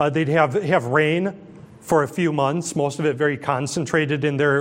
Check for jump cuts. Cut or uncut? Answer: uncut